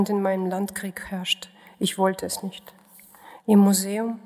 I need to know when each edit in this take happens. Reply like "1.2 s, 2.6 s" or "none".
none